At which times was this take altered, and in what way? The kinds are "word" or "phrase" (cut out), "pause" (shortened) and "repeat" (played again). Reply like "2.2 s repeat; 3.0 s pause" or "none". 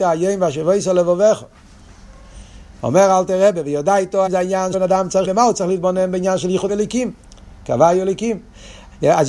4.3 s word; 4.7 s word; 5.2 s word; 6.7 s word